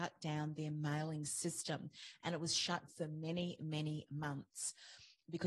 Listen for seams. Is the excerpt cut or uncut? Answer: cut